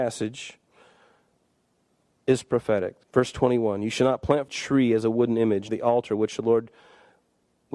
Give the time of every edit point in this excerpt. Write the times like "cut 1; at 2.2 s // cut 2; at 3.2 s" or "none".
cut 1; at 3.0 s // cut 2; at 4.5 s // cut 3; at 5.7 s